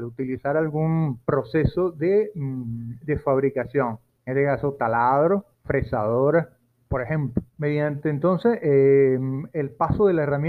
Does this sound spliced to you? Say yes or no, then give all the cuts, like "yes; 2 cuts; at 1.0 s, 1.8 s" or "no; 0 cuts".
yes; 4 cuts; at 1.2 s, 4.2 s, 5.5 s, 7.5 s